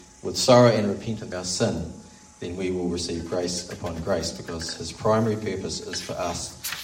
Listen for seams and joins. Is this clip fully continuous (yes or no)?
no